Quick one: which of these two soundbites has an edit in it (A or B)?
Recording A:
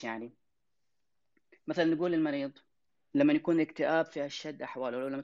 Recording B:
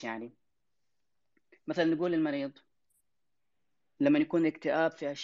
A